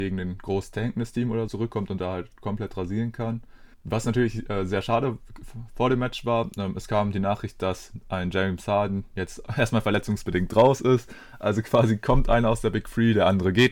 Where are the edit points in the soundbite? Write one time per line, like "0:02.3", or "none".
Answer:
0:01.5
0:03.7